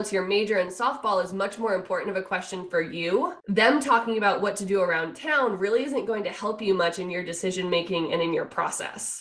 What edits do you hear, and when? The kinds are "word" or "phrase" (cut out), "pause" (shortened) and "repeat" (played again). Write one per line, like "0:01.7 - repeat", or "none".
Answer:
0:03.4 - pause